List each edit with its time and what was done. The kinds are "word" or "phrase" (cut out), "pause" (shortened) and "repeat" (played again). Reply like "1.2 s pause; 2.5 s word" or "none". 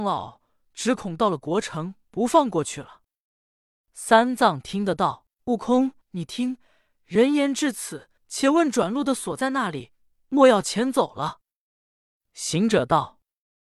2.0 s pause; 5.3 s pause; 6.0 s pause; 8.2 s pause